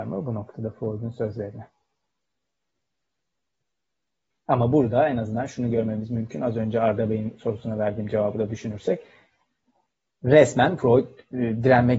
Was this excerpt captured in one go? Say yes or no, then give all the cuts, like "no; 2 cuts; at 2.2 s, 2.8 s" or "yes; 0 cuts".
yes; 0 cuts